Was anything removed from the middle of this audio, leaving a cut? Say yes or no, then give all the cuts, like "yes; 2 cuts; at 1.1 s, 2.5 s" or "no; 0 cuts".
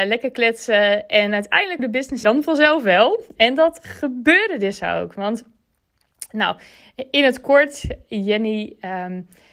yes; 2 cuts; at 1.8 s, 2.2 s